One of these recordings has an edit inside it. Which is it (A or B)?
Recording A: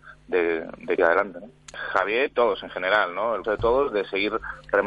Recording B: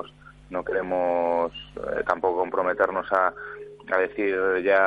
A